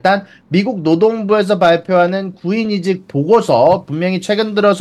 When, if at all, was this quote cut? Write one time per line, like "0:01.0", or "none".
none